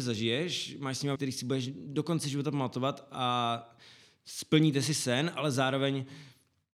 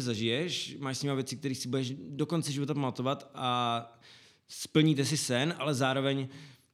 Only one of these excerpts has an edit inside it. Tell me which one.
first; 1 cut; at 1.2 s

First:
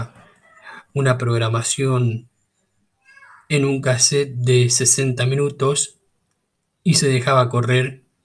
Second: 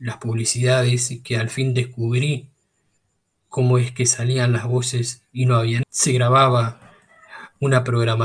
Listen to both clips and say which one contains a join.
second; 1 cut; at 5.8 s

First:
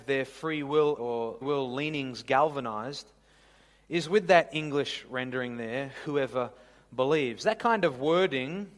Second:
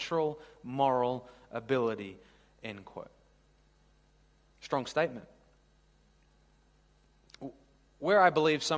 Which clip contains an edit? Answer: first; 2 cuts; at 1.0 s, 1.4 s

